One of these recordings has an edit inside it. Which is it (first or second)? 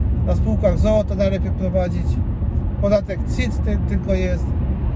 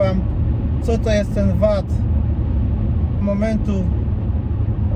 second